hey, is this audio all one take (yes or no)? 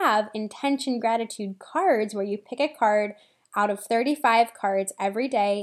yes